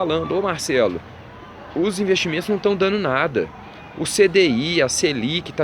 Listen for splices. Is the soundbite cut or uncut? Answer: uncut